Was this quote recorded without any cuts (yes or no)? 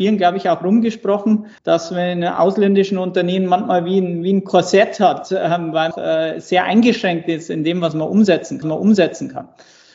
no